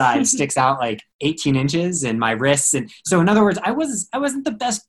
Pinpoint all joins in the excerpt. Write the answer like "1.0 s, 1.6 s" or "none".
1.1 s